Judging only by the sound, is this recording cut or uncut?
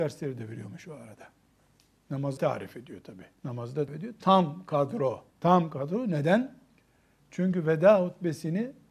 cut